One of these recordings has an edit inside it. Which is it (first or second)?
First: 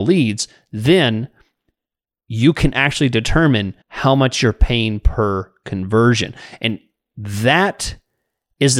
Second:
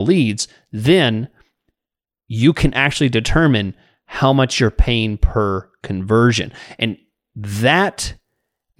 first